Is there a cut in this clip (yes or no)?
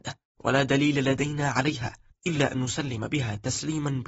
no